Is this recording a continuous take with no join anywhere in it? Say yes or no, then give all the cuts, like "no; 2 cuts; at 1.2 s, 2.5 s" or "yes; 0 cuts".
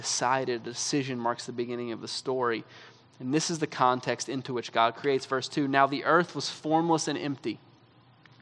yes; 0 cuts